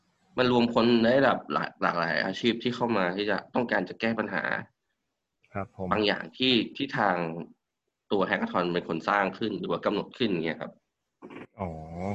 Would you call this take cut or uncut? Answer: uncut